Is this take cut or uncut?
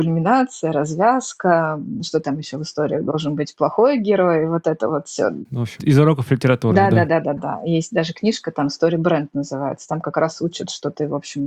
cut